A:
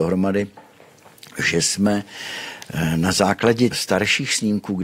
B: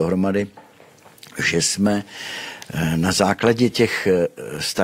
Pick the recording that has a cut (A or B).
A